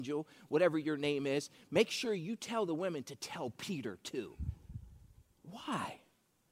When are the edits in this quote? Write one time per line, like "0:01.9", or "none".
none